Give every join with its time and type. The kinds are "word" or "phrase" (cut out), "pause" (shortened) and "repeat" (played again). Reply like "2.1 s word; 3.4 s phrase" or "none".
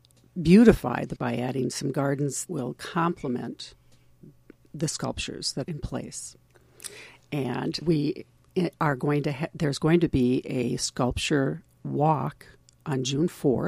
1.2 s word; 2.5 s word; 5.6 s word; 7.8 s word